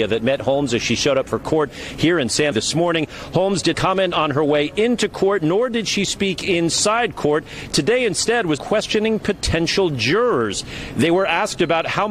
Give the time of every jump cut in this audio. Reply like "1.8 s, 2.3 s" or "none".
2.5 s, 3.7 s, 8.6 s